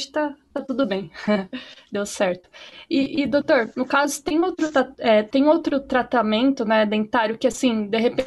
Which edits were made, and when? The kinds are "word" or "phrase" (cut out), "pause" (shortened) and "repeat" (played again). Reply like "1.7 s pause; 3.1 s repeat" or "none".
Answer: none